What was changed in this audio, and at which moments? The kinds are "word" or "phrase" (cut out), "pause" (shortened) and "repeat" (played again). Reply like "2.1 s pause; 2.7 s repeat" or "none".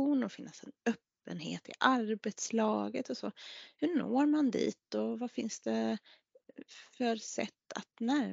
none